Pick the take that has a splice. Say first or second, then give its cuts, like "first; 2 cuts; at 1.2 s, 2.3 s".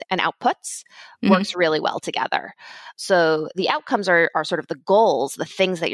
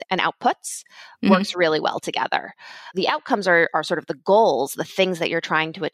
second; 1 cut; at 2.9 s